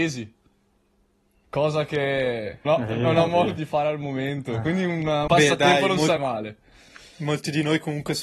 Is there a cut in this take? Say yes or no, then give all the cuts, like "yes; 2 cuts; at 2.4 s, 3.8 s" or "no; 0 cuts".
yes; 4 cuts; at 2.7 s, 3.6 s, 5.3 s, 6.2 s